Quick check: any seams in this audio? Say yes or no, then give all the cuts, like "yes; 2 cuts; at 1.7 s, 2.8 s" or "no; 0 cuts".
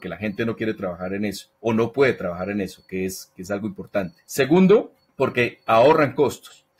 no; 0 cuts